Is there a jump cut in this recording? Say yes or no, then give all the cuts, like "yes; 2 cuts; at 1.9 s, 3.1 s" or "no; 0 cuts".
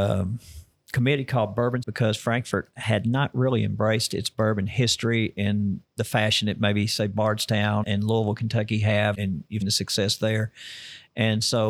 yes; 4 cuts; at 1.8 s, 7.8 s, 9.1 s, 9.6 s